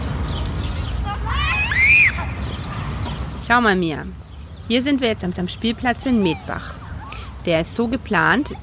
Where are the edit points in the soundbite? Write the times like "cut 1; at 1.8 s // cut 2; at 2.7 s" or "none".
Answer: cut 1; at 5.3 s